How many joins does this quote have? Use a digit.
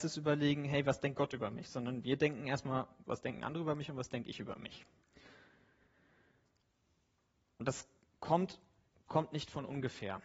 0